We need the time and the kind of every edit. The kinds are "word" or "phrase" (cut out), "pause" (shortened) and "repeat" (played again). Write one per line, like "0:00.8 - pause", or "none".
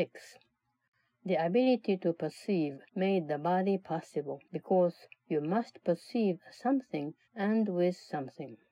0:02.9 - pause
0:04.4 - pause
0:07.2 - pause